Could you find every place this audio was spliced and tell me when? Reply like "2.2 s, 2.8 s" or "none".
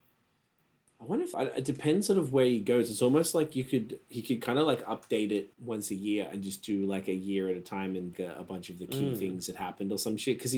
1.3 s, 5.5 s, 8.1 s